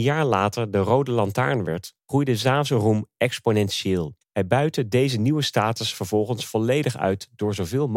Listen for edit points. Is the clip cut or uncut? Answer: cut